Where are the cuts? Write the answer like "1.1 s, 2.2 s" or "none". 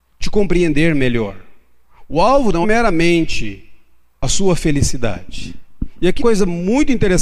2.6 s, 4.1 s, 6.2 s